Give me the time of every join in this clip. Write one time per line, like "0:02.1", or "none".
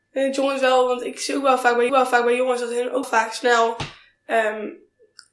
0:01.9
0:03.0